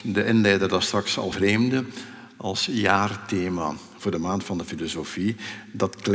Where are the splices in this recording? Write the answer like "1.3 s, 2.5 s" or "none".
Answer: 1.3 s